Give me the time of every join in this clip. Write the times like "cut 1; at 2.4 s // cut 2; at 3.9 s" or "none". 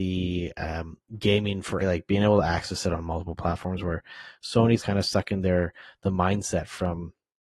cut 1; at 1.8 s // cut 2; at 4.8 s